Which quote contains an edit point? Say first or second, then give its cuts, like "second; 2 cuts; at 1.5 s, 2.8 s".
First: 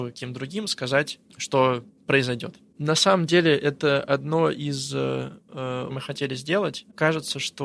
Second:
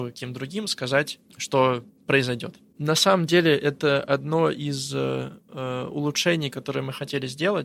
first; 1 cut; at 5.9 s